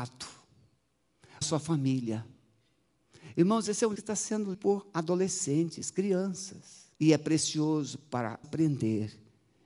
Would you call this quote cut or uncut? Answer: cut